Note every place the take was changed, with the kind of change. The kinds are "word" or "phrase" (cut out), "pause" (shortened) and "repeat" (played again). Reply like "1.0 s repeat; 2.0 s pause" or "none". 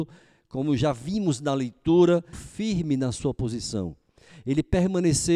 2.3 s phrase